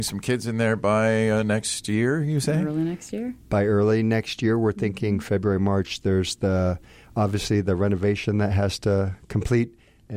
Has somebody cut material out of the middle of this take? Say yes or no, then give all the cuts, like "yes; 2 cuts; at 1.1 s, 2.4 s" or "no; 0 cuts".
no; 0 cuts